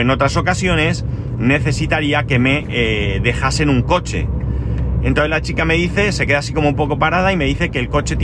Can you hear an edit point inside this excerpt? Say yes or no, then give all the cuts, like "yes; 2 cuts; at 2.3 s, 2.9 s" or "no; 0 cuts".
no; 0 cuts